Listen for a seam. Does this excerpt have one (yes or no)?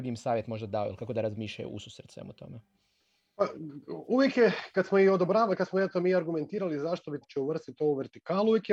yes